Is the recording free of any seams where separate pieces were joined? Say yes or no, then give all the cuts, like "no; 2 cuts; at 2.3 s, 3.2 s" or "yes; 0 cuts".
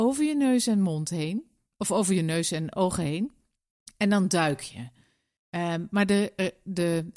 yes; 0 cuts